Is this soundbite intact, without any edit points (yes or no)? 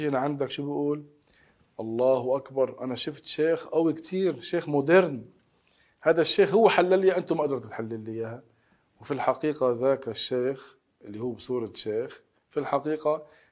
yes